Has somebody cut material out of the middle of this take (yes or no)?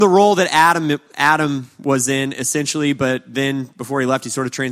no